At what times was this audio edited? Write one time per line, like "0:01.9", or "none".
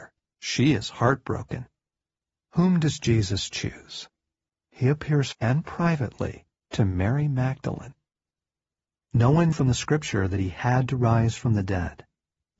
0:05.3
0:06.5
0:09.5

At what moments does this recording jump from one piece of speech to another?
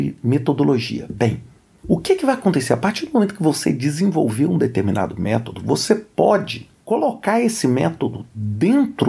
none

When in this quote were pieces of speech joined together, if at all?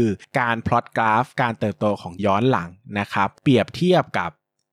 0:02.2

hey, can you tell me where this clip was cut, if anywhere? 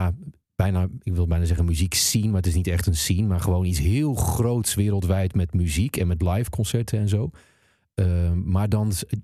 none

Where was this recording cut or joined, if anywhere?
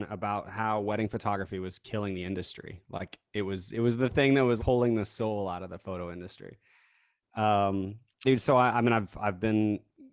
0:04.6
0:08.2

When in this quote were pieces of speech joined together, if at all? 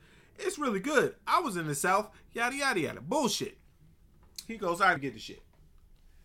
0:02.5
0:05.0

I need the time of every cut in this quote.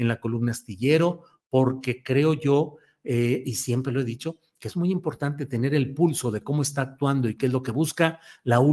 none

